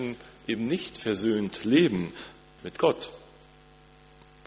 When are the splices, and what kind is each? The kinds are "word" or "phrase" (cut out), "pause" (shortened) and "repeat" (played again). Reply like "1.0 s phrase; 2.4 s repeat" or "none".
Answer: 2.6 s phrase